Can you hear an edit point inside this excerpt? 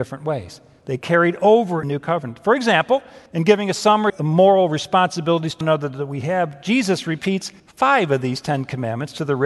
yes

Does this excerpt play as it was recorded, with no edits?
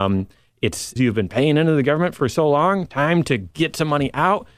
no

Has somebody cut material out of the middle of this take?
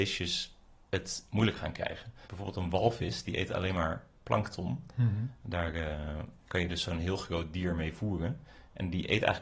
yes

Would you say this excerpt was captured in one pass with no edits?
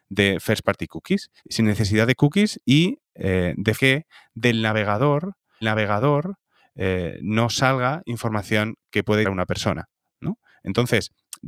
no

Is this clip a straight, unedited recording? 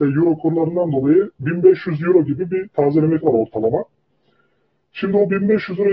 no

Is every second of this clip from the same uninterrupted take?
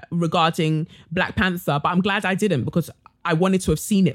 yes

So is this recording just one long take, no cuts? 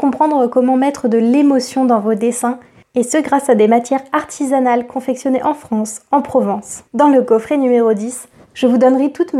no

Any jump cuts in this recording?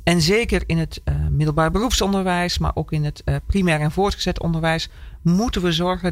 no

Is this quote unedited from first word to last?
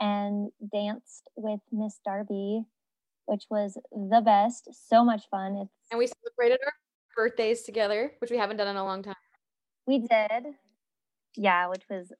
yes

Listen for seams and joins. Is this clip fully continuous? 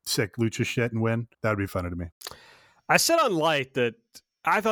no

